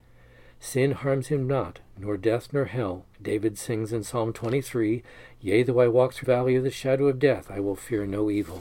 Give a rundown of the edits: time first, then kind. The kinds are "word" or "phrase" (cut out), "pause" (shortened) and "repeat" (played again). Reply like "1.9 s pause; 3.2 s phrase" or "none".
3.1 s pause; 6.2 s word

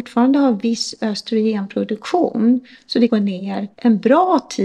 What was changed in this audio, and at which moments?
3.1 s phrase; 3.7 s pause

